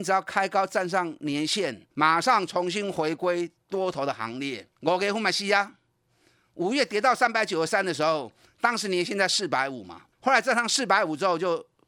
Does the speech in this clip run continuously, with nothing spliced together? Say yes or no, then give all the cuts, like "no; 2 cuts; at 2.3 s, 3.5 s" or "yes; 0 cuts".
no; 3 cuts; at 1.9 s, 4.7 s, 10.1 s